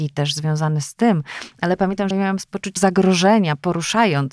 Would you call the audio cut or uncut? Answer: cut